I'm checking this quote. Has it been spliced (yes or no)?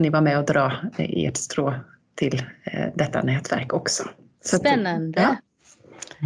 no